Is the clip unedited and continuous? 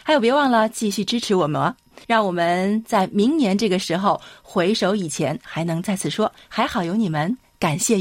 no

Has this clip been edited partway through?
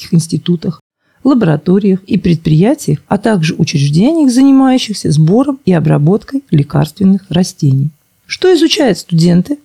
no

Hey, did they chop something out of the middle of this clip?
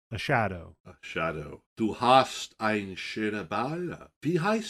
yes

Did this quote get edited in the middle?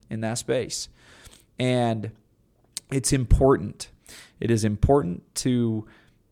no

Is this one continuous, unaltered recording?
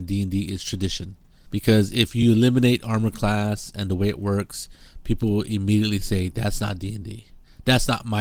yes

